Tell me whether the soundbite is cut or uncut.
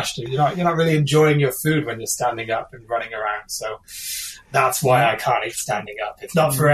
uncut